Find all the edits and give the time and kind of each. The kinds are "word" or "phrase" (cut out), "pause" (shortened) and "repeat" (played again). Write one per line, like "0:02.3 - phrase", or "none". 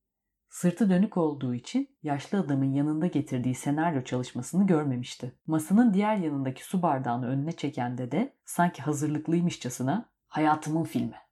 0:01.9 - pause
0:05.4 - pause
0:08.4 - pause
0:10.2 - pause